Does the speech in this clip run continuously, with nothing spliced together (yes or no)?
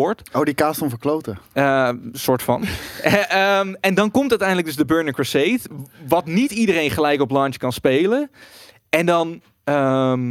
yes